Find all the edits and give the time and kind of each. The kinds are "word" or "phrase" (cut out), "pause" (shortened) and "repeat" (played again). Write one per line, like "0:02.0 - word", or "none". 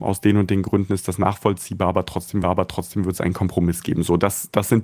0:02.4 - repeat